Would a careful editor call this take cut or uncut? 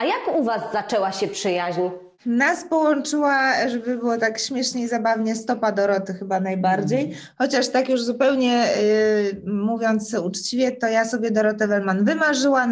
uncut